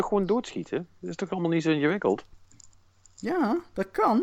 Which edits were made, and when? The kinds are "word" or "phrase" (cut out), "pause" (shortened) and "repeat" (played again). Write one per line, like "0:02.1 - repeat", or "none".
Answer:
none